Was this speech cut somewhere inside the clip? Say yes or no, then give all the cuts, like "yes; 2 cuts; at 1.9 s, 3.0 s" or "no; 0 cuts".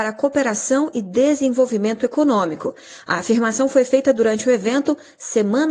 no; 0 cuts